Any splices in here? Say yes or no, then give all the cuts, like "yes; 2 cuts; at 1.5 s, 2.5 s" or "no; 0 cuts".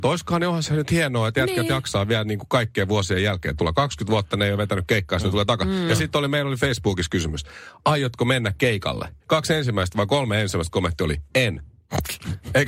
yes; 2 cuts; at 9.2 s, 11.3 s